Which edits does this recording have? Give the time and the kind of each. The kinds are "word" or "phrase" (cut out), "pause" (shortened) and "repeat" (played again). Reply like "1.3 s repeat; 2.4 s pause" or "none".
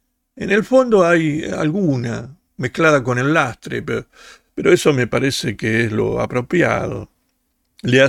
none